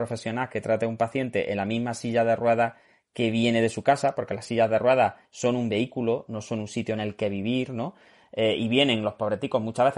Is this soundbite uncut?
yes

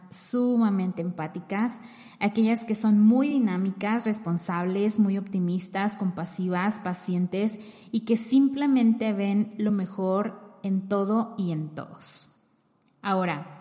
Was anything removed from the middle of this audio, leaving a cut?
no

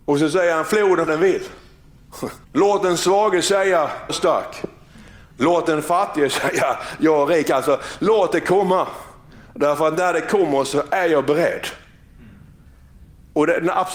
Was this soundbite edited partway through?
yes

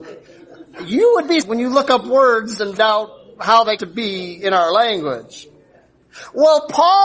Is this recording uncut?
no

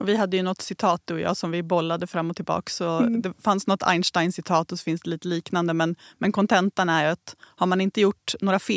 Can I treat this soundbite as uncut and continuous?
yes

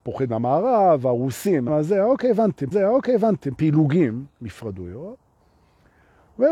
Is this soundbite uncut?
no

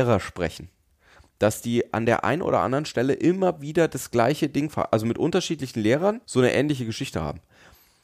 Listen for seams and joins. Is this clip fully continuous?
no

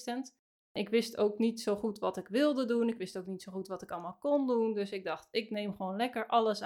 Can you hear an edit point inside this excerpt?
no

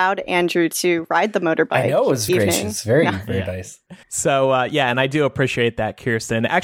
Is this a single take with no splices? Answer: no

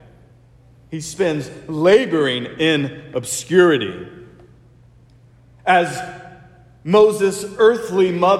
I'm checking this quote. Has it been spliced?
no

